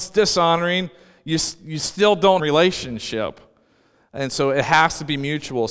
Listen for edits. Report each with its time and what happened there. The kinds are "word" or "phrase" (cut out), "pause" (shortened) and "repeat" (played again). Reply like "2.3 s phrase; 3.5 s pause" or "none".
2.4 s phrase

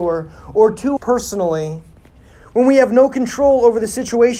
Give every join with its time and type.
1.0 s word

